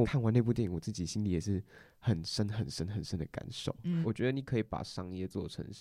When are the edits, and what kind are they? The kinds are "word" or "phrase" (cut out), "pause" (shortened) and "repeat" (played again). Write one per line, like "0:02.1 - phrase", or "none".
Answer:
none